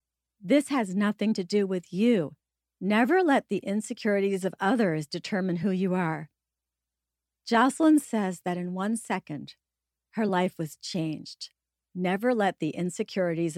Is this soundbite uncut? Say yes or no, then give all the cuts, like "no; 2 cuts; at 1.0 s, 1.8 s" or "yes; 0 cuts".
yes; 0 cuts